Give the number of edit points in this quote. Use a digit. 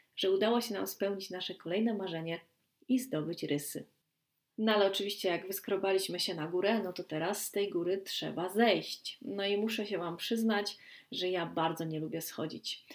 0